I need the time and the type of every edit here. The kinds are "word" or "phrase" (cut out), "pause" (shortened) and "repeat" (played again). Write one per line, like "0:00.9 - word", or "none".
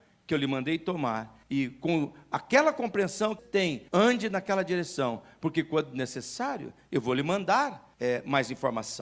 0:01.4 - pause
0:03.4 - word
0:03.9 - pause
0:07.9 - pause